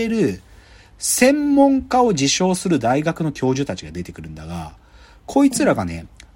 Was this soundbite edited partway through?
no; 0 cuts

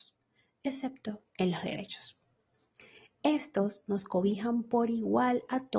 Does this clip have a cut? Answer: no; 0 cuts

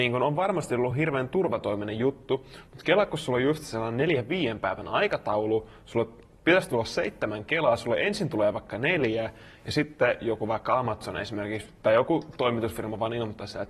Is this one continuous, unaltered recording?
yes; 0 cuts

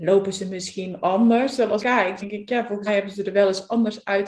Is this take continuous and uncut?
no; 3 cuts; at 1.8 s, 2.2 s, 2.9 s

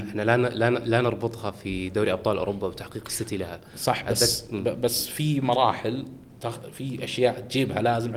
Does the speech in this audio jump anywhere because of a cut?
no; 0 cuts

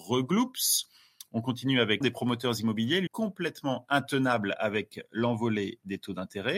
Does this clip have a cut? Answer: yes; 2 cuts; at 2.0 s, 3.1 s

